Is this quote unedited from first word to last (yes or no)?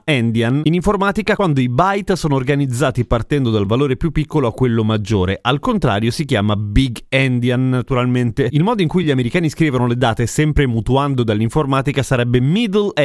yes